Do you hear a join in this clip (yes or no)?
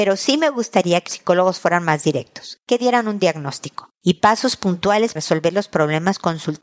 yes